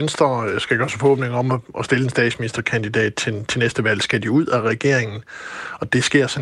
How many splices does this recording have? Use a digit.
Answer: 0